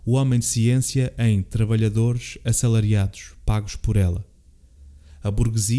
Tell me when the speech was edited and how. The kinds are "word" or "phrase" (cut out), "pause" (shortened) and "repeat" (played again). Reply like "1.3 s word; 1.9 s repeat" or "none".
none